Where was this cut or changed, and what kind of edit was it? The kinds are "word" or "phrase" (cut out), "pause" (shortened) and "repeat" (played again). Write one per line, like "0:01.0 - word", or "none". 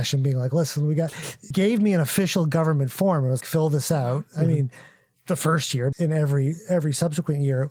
0:01.5 - word
0:03.4 - word
0:05.9 - word